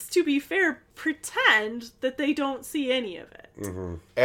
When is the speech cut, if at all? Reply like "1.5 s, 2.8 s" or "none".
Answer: none